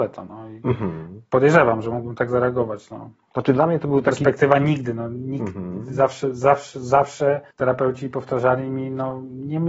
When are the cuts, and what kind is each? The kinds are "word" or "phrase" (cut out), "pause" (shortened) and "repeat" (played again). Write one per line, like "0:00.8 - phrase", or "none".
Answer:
0:07.5 - pause